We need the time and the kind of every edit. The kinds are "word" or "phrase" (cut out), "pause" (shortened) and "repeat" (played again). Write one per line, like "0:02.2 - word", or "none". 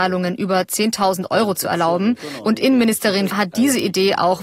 0:03.3 - word